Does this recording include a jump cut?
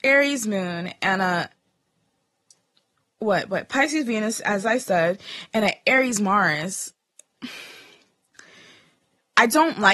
no; 0 cuts

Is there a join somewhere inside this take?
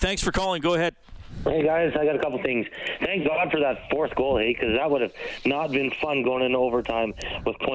no; 0 cuts

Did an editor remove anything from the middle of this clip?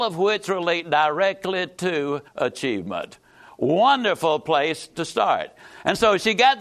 yes; 1 cut; at 2.3 s

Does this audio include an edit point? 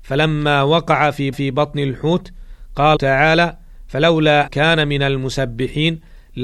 yes; 3 cuts; at 1.3 s, 3.0 s, 4.5 s

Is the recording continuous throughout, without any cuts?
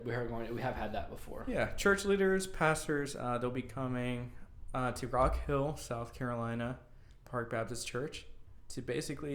yes; 0 cuts

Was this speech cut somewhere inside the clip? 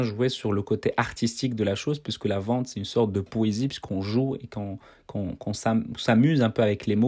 no; 0 cuts

